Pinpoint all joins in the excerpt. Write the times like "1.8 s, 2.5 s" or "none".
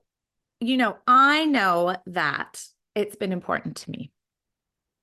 none